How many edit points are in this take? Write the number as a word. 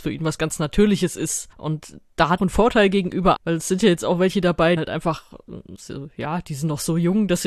four